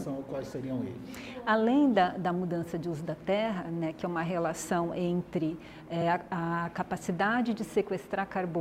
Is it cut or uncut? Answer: uncut